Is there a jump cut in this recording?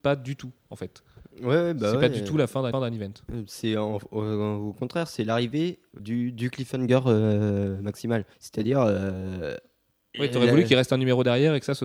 yes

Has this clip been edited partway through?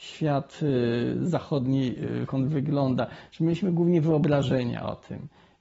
yes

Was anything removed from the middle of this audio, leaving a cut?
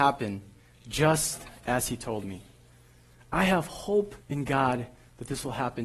yes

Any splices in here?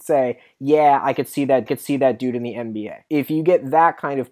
yes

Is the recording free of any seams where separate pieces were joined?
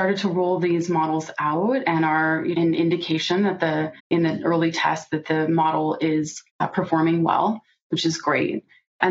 no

